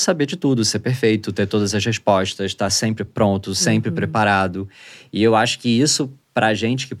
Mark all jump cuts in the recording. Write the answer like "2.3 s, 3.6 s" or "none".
none